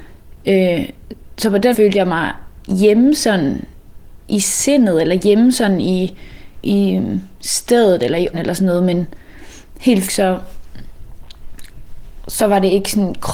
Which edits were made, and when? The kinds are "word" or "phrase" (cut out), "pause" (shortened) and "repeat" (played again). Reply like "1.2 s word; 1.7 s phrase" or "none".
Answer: 1.7 s word; 6.6 s word; 8.3 s word; 10.1 s word